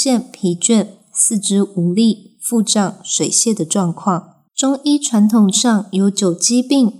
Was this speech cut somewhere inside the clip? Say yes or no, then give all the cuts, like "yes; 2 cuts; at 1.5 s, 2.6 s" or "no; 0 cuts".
yes; 1 cut; at 4.5 s